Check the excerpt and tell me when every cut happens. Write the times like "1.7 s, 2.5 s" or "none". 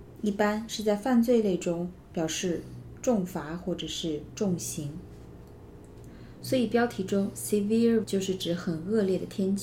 8.0 s